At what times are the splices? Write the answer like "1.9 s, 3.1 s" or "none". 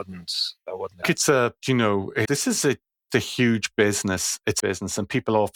1.0 s, 1.6 s, 2.2 s, 3.1 s, 4.6 s